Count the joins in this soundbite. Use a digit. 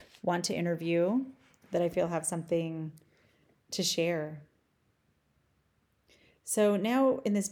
0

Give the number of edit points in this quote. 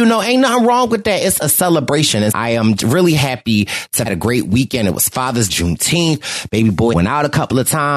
5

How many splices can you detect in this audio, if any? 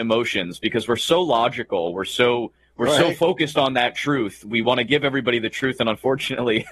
0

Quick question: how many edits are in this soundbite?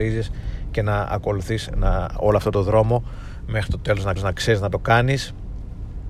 1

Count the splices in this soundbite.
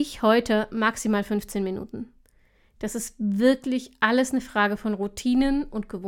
0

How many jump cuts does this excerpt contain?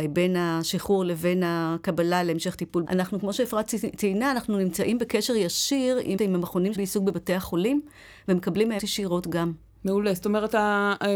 4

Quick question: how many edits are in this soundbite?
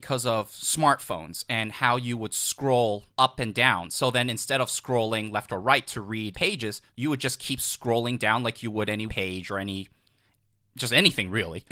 4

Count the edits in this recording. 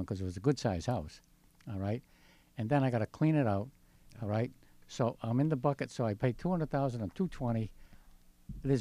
0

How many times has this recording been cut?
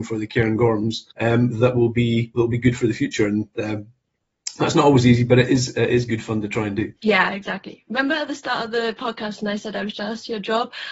2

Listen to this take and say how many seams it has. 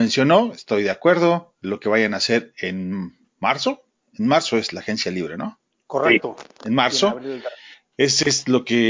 0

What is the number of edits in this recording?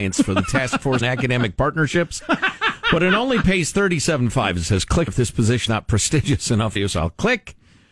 4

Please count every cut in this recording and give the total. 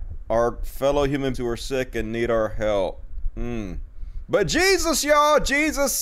1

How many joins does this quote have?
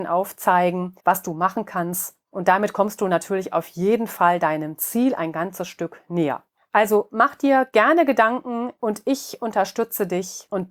1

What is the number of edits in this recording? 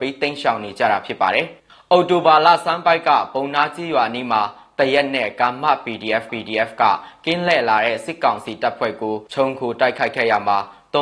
3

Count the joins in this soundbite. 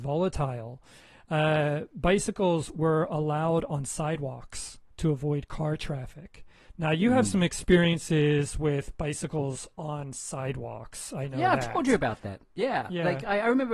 0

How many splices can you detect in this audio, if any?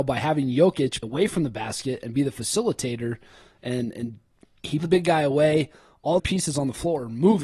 3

